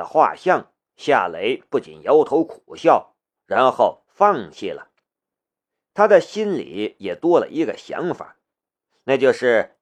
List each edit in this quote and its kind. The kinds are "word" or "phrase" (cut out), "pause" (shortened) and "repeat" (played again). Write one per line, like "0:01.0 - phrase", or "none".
none